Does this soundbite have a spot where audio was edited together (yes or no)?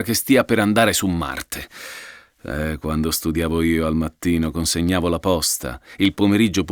no